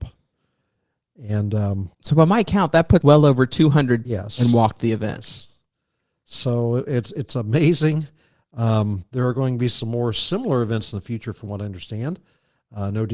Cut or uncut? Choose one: cut